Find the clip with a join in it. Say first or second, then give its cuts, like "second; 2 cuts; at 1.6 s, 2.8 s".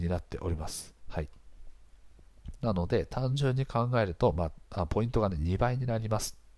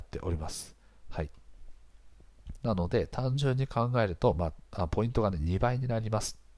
first; 1 cut; at 1.0 s